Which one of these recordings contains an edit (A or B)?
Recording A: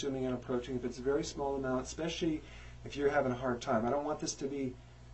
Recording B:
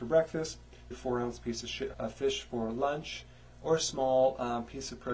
B